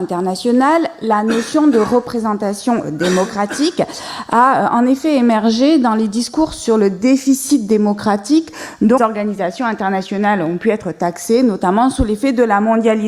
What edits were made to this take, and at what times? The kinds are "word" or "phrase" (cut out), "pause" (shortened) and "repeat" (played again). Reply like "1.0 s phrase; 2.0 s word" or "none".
9.0 s word